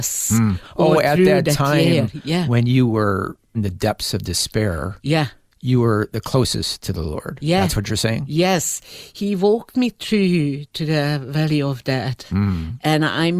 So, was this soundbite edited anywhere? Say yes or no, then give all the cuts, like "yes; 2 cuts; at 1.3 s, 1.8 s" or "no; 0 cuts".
no; 0 cuts